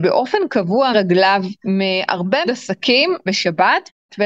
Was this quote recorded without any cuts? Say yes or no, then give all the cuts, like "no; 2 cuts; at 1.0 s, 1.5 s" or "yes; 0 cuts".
no; 3 cuts; at 0.9 s, 2.5 s, 3.3 s